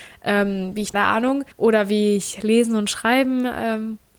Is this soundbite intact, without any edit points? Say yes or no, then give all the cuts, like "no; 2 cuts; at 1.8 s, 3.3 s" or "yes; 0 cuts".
no; 2 cuts; at 0.9 s, 1.5 s